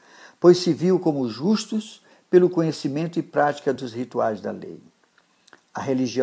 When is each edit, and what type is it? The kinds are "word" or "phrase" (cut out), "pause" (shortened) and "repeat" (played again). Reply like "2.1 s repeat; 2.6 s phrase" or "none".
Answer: none